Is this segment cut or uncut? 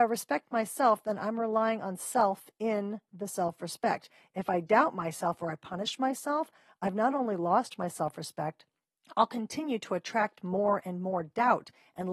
uncut